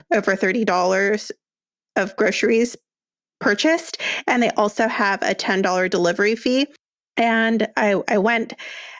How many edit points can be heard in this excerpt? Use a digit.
0